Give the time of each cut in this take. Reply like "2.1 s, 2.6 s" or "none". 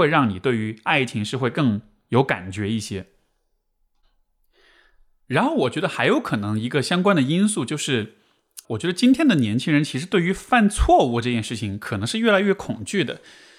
8.6 s